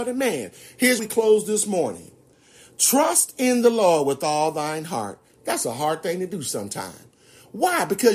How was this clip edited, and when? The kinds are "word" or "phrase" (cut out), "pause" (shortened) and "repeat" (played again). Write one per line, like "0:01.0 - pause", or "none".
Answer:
0:01.0 - word